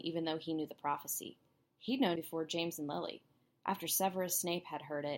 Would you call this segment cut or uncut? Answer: cut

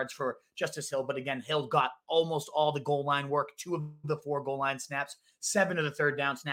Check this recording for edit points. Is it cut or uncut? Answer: uncut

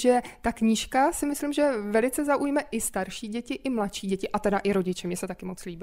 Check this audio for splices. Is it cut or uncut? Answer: uncut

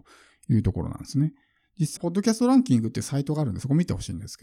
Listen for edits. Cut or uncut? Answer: cut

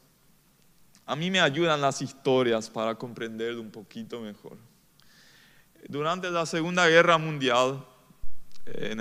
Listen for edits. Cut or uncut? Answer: uncut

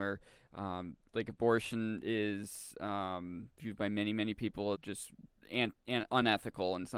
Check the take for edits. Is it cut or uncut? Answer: cut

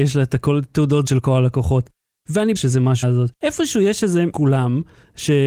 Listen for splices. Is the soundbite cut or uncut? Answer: cut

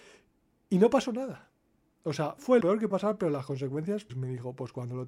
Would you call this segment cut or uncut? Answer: cut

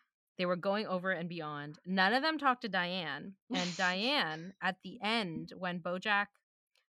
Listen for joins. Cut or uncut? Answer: uncut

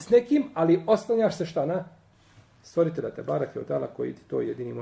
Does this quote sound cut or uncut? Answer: uncut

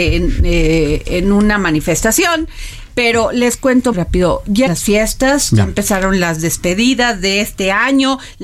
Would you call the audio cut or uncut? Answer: cut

